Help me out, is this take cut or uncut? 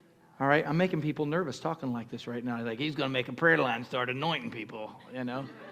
uncut